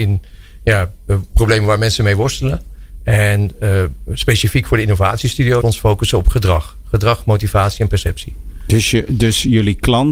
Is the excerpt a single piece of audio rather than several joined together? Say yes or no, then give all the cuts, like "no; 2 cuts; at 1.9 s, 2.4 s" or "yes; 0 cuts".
no; 1 cut; at 5.6 s